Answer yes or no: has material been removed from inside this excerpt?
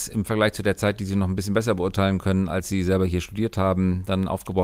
no